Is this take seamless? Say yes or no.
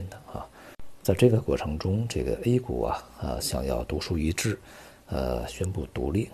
yes